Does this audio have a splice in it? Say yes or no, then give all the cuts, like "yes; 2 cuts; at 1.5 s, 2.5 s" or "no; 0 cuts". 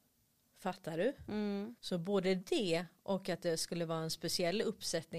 yes; 1 cut; at 1.8 s